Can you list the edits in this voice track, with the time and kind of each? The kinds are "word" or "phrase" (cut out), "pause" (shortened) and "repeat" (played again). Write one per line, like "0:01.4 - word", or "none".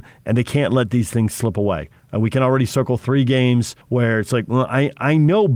0:03.8 - pause